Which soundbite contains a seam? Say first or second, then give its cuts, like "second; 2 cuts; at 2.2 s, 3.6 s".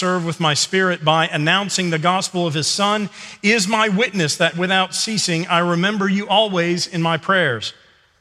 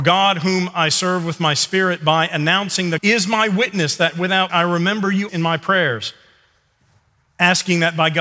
second; 3 cuts; at 3.0 s, 4.5 s, 5.3 s